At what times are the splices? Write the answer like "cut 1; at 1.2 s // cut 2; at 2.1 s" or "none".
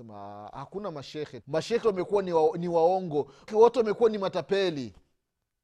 cut 1; at 1.4 s // cut 2; at 1.8 s // cut 3; at 3.5 s

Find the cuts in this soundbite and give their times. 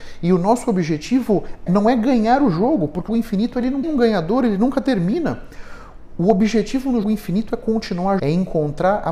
cut 1; at 1.7 s // cut 2; at 3.1 s // cut 3; at 3.8 s // cut 4; at 7.0 s // cut 5; at 8.2 s

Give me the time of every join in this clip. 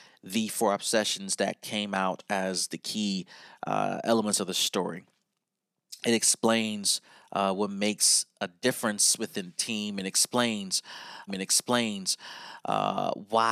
cut 1; at 11.3 s

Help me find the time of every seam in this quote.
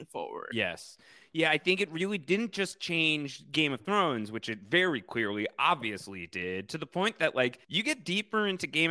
cut 1; at 7.6 s

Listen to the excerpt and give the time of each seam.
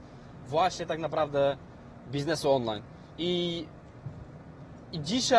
cut 1; at 3.1 s

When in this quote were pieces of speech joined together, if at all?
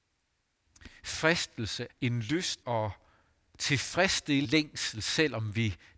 cut 1; at 1.9 s // cut 2; at 2.6 s // cut 3; at 4.4 s

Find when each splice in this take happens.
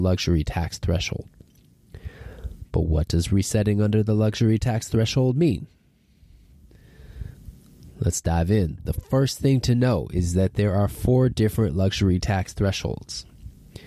none

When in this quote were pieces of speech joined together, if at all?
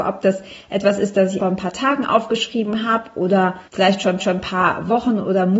cut 1; at 1.4 s // cut 2; at 3.7 s // cut 3; at 4.2 s

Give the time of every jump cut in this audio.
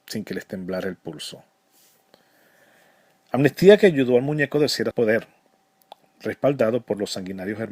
cut 1; at 4.9 s

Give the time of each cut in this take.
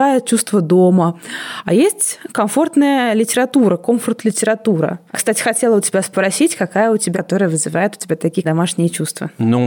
cut 1; at 4.2 s // cut 2; at 5.1 s // cut 3; at 7.1 s // cut 4; at 8.4 s

